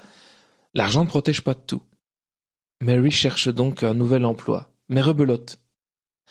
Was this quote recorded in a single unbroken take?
yes; 0 cuts

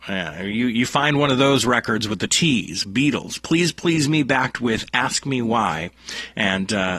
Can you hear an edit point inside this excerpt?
yes; 1 cut; at 2.3 s

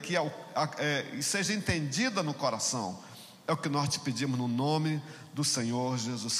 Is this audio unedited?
yes; 0 cuts

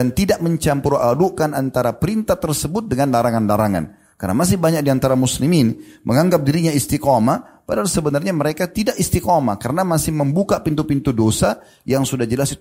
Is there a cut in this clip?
no; 0 cuts

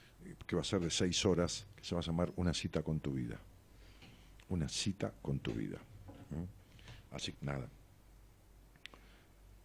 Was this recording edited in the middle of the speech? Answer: yes; 2 cuts; at 1.8 s, 7.3 s

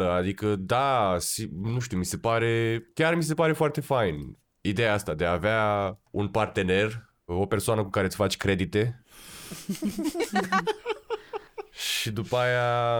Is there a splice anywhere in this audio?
yes; 1 cut; at 6.1 s

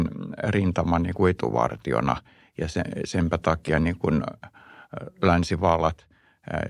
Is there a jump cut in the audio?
no; 0 cuts

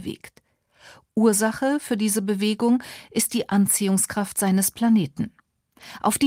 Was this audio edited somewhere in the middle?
no; 0 cuts

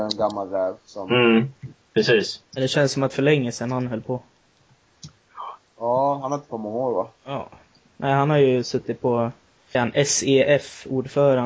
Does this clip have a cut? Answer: yes; 3 cuts; at 3.1 s, 6.5 s, 9.7 s

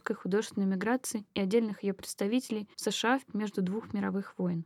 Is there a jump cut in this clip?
yes; 2 cuts; at 2.7 s, 3.3 s

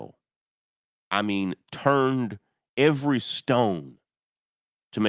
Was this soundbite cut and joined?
no; 0 cuts

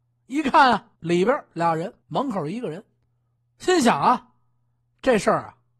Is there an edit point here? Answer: yes; 3 cuts; at 1.0 s, 2.0 s, 3.4 s

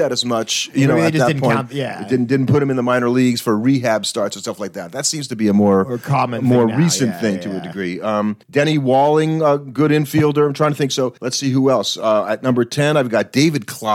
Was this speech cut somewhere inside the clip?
yes; 2 cuts; at 8.4 s, 11.2 s

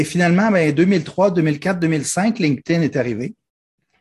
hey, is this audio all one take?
yes; 0 cuts

